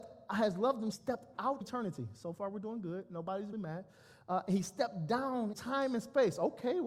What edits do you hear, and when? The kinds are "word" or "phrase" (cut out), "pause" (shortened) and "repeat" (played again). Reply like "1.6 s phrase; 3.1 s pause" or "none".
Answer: 0.9 s phrase; 1.6 s word; 3.5 s word; 5.5 s word

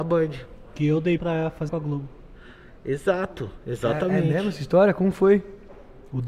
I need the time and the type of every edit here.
1.2 s word; 1.7 s word

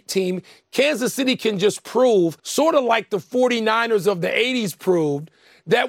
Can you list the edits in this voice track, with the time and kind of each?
2.4 s pause

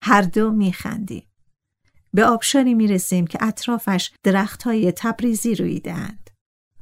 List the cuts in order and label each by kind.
4.2 s pause

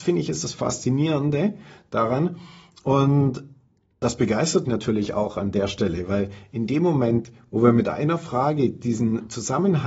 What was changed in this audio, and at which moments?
4.6 s word

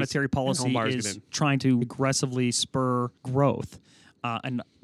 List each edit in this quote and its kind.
1.8 s word; 3.2 s pause

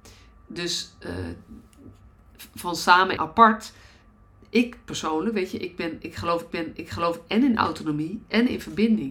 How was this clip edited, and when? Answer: 3.2 s word; 6.5 s repeat

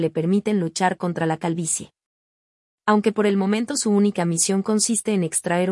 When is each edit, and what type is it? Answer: none

